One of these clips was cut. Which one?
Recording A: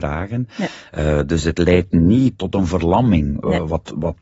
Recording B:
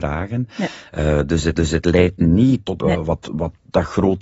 B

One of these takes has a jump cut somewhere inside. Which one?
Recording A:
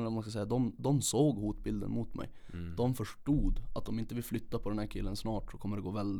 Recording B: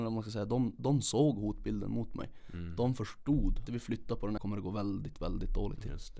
B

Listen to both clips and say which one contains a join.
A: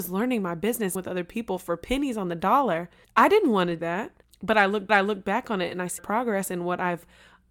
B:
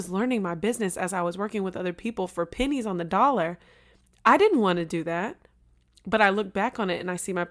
A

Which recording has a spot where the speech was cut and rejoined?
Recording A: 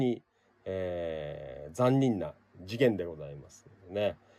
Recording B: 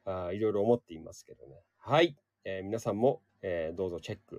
B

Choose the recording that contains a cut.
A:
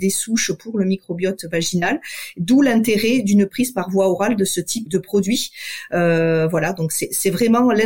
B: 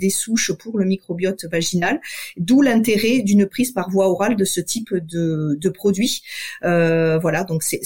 A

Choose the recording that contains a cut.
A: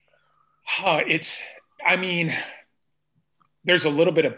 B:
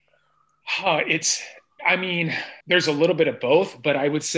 B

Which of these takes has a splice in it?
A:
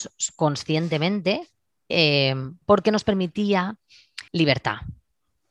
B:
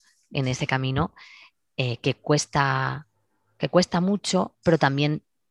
A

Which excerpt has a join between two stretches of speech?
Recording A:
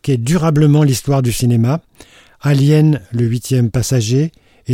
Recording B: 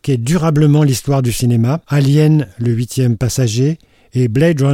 B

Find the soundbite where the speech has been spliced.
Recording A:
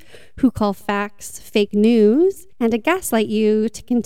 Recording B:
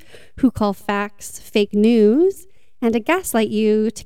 A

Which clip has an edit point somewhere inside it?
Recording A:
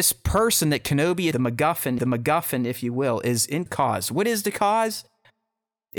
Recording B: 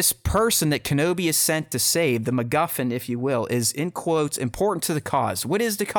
A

